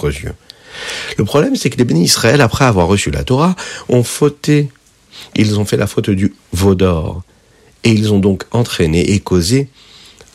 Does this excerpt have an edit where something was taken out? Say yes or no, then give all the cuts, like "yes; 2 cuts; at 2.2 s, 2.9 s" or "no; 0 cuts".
no; 0 cuts